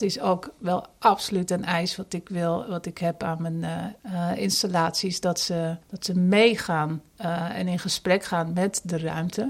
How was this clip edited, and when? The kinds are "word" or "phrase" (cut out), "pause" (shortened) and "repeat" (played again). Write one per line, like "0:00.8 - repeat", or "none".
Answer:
0:04.0 - pause
0:05.8 - pause